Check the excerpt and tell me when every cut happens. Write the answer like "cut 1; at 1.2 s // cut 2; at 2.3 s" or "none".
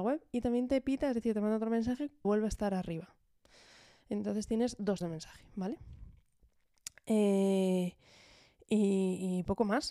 cut 1; at 2.2 s // cut 2; at 5.0 s